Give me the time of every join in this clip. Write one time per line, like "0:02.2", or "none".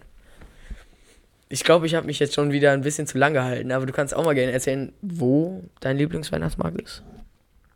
none